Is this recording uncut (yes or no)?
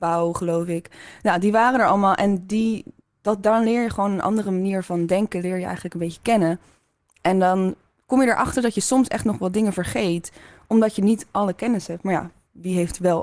yes